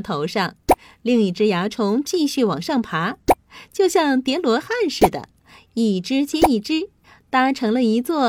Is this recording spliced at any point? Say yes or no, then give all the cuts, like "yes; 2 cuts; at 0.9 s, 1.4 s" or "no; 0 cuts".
no; 0 cuts